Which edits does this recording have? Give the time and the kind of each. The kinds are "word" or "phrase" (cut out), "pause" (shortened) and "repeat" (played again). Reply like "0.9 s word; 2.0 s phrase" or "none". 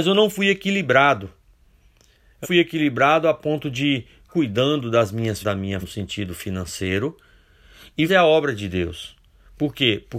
2.4 s word; 4.3 s word; 5.4 s word; 5.8 s word; 8.1 s word